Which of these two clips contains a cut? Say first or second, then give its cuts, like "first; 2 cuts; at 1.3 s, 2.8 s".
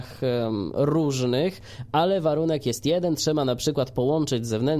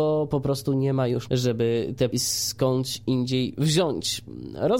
second; 2 cuts; at 1.3 s, 2.1 s